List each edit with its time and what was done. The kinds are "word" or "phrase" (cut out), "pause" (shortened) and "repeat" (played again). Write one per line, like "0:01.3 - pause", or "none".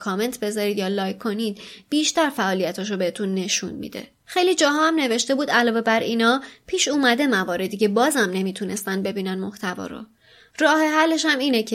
none